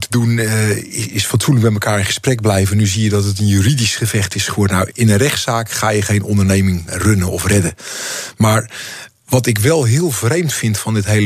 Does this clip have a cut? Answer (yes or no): yes